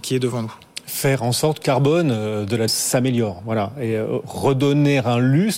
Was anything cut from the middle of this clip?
yes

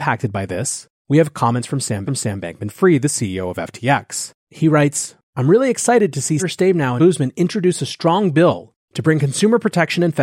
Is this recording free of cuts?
no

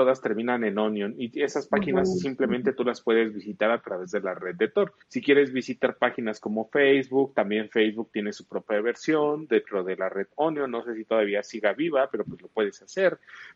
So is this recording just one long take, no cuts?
no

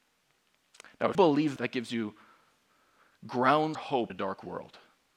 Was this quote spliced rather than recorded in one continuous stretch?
yes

